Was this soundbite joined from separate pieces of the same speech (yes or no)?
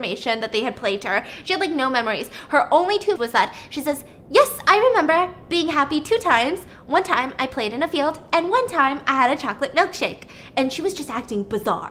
yes